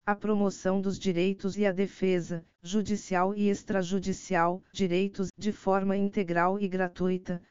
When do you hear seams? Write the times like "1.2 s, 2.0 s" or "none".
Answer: 1.5 s, 2.5 s, 4.7 s, 5.3 s